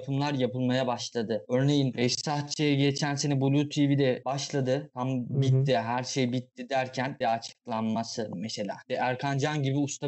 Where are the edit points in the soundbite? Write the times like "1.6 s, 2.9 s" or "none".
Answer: 7.2 s